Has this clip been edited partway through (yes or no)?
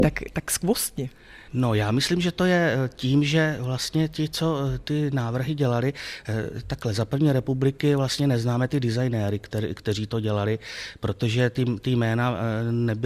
yes